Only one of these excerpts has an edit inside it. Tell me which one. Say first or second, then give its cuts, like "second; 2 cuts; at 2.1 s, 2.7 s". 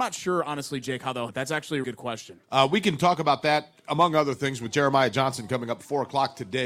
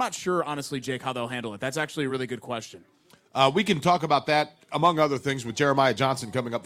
first; 3 cuts; at 1.3 s, 1.8 s, 2.4 s